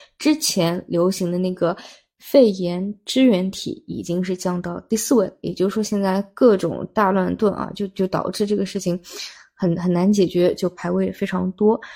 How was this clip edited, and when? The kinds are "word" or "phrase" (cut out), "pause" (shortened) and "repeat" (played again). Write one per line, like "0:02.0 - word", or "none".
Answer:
none